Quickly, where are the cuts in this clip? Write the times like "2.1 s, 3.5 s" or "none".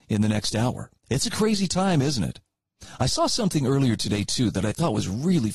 1.0 s